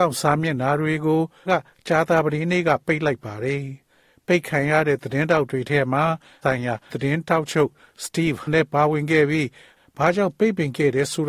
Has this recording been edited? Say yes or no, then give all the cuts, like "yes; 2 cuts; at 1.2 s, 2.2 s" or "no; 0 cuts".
yes; 4 cuts; at 1.5 s, 6.4 s, 6.9 s, 8.5 s